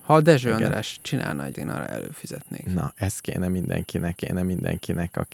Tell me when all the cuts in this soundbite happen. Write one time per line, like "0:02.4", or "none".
0:01.5
0:04.2